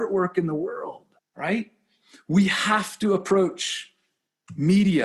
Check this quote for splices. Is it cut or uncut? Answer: cut